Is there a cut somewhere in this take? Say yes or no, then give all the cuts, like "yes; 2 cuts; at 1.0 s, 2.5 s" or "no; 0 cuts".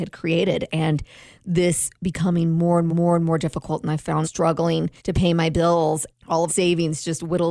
yes; 6 cuts; at 1.9 s, 2.9 s, 4.2 s, 5.0 s, 6.1 s, 6.5 s